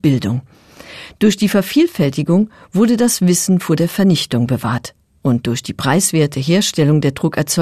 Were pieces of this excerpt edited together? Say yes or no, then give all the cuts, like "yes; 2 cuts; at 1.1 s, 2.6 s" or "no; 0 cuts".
no; 0 cuts